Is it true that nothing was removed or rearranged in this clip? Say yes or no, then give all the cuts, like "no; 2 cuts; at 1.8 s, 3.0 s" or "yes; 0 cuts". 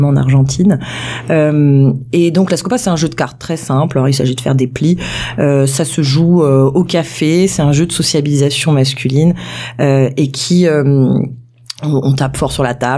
yes; 0 cuts